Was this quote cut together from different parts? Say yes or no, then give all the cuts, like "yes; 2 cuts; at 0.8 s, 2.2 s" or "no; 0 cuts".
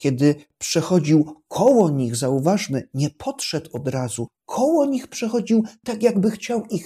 no; 0 cuts